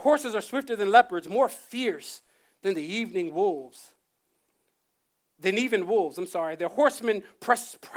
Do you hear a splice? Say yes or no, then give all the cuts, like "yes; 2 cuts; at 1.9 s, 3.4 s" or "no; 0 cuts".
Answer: no; 0 cuts